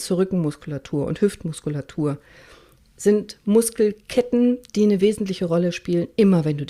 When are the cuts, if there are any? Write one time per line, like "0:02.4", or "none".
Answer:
none